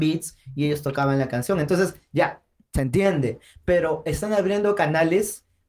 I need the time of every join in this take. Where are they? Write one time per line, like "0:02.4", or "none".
none

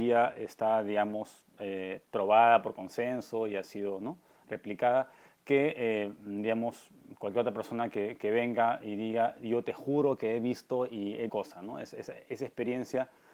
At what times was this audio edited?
0:11.3

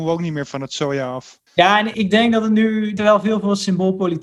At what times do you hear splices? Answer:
0:01.5
0:01.9
0:03.0

